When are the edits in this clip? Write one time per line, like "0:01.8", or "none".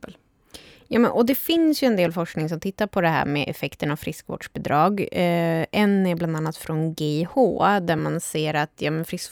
none